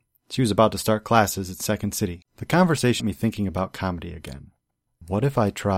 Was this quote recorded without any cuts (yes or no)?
no